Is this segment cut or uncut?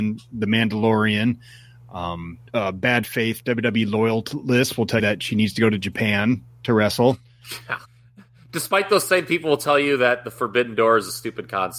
cut